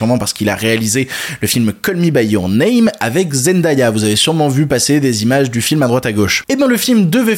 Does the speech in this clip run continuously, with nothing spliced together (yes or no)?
yes